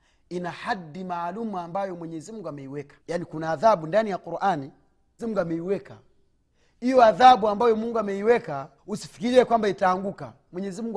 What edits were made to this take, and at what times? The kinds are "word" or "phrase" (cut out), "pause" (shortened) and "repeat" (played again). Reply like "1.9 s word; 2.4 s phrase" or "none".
3.0 s pause; 5.2 s word; 6.3 s pause; 8.8 s pause